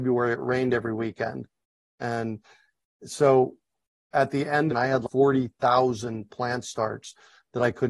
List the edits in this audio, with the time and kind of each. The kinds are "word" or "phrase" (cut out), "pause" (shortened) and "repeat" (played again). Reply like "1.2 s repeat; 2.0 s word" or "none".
4.7 s phrase